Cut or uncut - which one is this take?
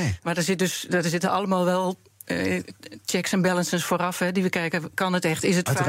uncut